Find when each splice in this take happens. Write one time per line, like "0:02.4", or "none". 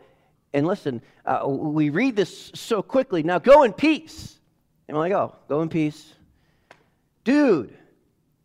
0:04.6